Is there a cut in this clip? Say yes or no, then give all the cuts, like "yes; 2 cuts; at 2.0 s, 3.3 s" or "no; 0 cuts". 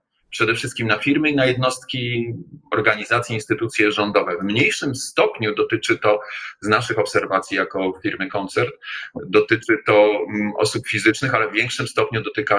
no; 0 cuts